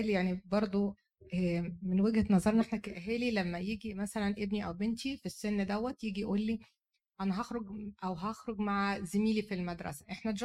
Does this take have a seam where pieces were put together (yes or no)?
no